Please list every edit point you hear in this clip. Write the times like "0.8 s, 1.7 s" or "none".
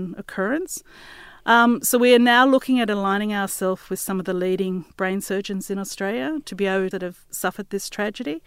6.9 s